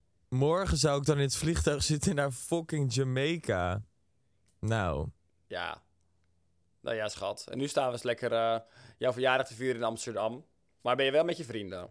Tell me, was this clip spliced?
no; 0 cuts

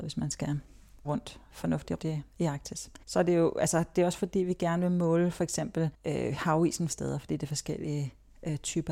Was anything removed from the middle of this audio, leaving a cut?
yes; 6 cuts; at 1.0 s, 2.0 s, 2.3 s, 3.0 s, 5.9 s, 6.9 s

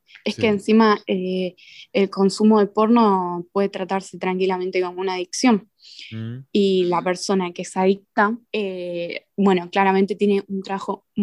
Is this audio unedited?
no; 1 cut; at 8.5 s

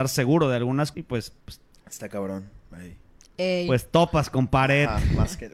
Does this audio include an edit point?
yes; 2 cuts; at 0.9 s, 1.4 s

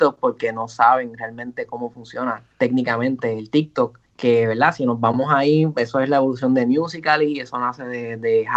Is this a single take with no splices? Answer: no; 2 cuts; at 2.5 s, 4.0 s

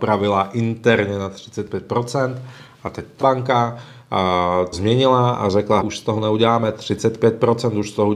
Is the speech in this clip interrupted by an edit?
yes; 3 cuts; at 3.2 s, 4.7 s, 5.8 s

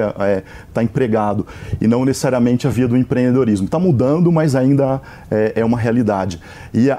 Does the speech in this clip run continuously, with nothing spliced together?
yes; 0 cuts

